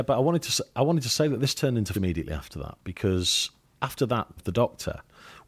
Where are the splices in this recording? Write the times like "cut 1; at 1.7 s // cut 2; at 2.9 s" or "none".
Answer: cut 1; at 1.9 s // cut 2; at 4.4 s